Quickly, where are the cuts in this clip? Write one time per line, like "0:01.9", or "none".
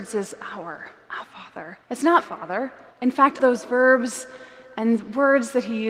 0:01.2
0:01.8
0:02.2
0:02.9
0:03.4